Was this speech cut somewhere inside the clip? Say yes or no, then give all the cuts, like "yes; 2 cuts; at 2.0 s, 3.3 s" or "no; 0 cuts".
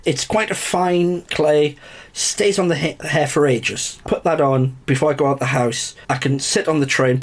yes; 4 cuts; at 1.3 s, 4.1 s, 4.8 s, 6.0 s